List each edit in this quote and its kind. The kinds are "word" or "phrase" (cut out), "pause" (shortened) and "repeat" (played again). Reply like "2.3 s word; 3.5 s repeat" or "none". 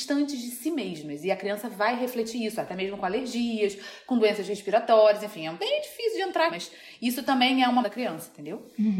5.6 s word; 6.5 s word; 7.8 s word